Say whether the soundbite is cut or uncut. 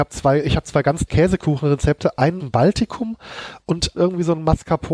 cut